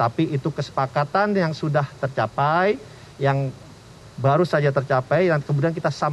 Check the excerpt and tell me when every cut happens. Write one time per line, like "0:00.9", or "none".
0:03.1